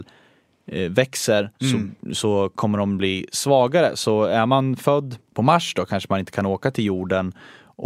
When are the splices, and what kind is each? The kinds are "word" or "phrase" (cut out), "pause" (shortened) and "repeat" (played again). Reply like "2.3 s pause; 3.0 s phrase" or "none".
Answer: 1.5 s pause; 5.3 s pause